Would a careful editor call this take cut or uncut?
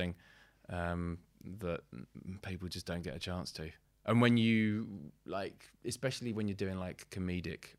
cut